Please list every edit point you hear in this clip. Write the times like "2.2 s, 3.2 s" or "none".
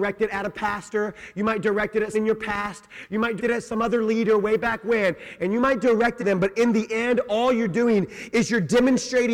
2.1 s, 3.4 s, 6.2 s